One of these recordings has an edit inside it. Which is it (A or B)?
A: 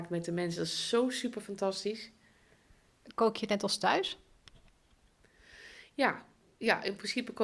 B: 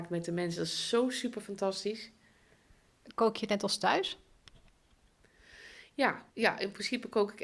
B